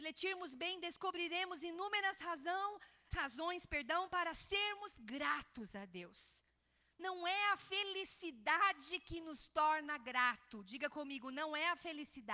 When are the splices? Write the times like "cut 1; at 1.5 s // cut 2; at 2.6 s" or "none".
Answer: cut 1; at 3.1 s